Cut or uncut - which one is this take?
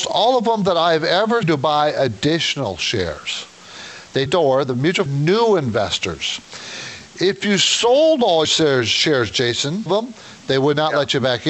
cut